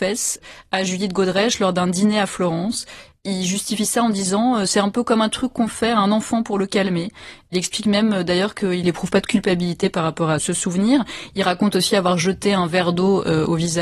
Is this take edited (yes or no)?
no